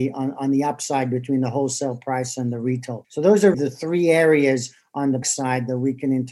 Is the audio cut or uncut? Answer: cut